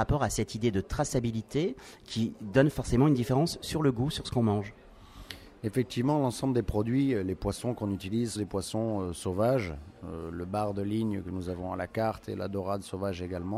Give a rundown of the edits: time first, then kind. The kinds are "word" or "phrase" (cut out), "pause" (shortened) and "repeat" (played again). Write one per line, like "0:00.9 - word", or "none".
0:08.3 - phrase